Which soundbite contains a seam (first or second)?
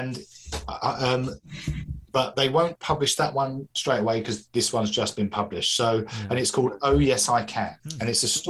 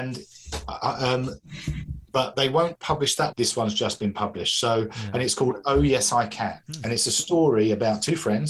second